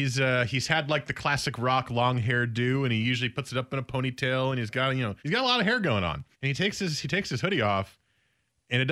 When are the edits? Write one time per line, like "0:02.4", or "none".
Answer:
0:05.2
0:06.3